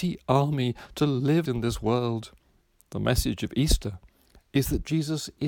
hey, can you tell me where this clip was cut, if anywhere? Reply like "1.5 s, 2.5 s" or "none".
1.5 s, 2.6 s